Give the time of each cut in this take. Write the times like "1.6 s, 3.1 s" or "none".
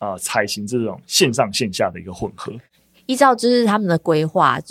none